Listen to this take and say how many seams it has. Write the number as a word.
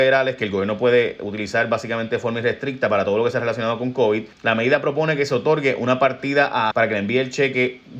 two